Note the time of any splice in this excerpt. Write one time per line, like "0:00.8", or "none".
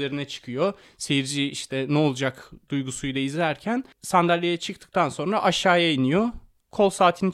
none